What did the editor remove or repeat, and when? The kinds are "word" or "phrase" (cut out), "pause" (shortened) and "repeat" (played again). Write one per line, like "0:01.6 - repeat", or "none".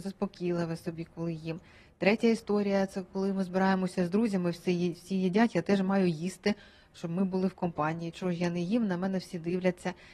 none